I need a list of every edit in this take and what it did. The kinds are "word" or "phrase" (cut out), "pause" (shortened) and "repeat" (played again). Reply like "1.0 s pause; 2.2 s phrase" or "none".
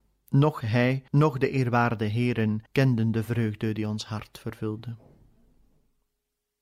1.1 s pause; 2.7 s pause